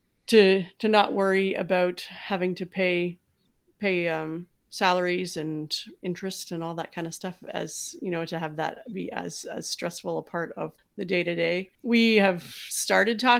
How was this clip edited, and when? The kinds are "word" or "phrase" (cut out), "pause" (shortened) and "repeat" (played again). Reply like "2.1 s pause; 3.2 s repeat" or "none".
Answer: 10.8 s word; 11.7 s pause